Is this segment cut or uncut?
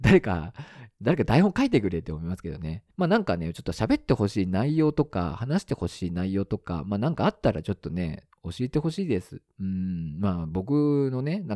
cut